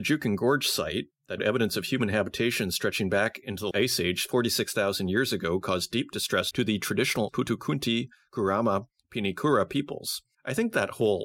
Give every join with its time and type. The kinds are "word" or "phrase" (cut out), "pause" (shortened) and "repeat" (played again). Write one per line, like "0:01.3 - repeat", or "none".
0:01.4 - word
0:03.7 - word
0:07.3 - word